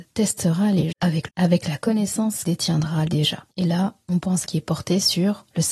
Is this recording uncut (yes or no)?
no